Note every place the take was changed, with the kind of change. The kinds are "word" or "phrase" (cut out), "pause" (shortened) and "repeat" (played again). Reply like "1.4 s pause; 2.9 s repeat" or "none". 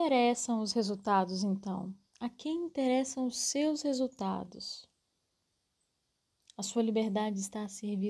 none